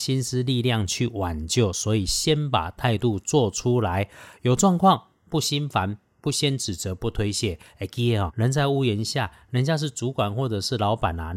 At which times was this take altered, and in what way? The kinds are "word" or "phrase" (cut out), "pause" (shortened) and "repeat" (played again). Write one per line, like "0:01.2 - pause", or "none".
0:08.3 - word